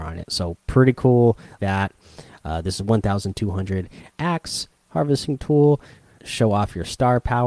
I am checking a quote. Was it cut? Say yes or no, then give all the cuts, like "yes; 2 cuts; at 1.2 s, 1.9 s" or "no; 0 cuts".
yes; 3 cuts; at 1.6 s, 4.1 s, 6.2 s